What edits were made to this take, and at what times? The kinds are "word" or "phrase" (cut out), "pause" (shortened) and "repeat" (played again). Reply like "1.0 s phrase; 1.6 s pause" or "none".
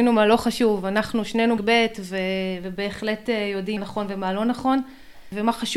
1.6 s word; 3.8 s word